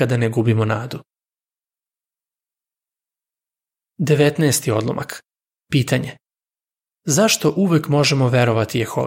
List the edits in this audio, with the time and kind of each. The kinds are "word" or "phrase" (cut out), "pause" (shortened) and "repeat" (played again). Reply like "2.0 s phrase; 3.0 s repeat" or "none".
none